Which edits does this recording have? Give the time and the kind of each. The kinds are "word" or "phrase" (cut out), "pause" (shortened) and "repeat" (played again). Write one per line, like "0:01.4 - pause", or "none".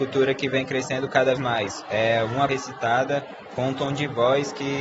0:01.4 - word
0:02.5 - word

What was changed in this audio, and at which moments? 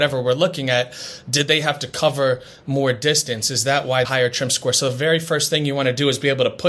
0:04.0 - phrase

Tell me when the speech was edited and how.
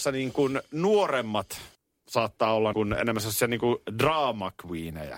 0:01.7 - pause
0:02.7 - word

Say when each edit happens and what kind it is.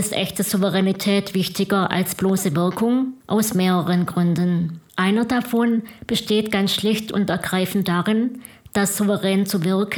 0:03.2 - pause
0:04.9 - pause

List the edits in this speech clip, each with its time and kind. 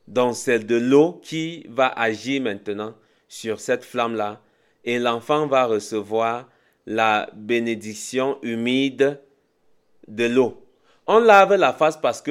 none

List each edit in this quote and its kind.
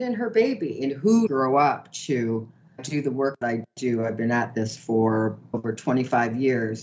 0:01.3 - phrase
0:02.8 - word
0:03.4 - word
0:05.5 - word

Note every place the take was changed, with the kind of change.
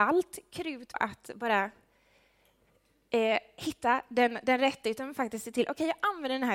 0:00.9 - word

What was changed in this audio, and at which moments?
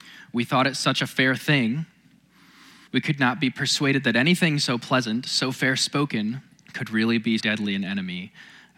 0:02.9 - pause
0:06.5 - pause
0:07.4 - word

